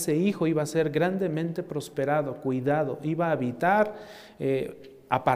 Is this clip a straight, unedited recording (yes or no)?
yes